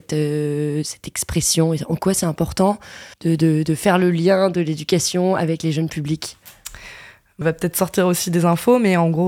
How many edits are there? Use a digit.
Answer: 2